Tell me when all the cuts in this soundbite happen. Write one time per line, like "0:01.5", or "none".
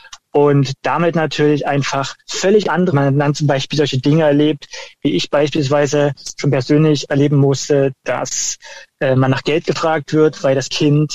0:02.2
0:02.9